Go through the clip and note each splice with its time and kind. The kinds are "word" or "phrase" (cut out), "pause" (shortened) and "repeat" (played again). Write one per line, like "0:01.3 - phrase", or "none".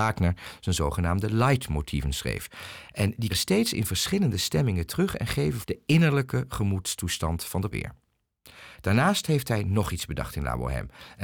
0:03.3 - word
0:05.6 - phrase
0:07.7 - word
0:08.7 - pause